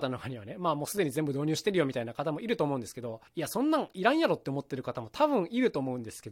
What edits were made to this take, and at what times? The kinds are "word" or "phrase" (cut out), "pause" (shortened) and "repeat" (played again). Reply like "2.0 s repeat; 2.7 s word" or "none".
3.3 s pause